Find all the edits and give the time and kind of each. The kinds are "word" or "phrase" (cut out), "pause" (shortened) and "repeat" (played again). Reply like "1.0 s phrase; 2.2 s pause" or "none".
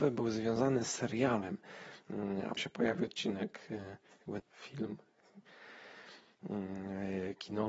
2.6 s word; 3.1 s word; 4.4 s word